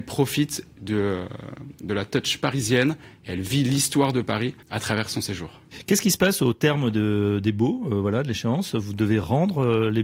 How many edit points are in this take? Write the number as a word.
one